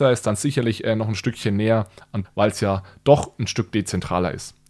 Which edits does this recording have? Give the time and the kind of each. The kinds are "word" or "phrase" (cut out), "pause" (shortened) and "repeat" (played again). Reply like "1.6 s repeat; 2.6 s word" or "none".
2.2 s word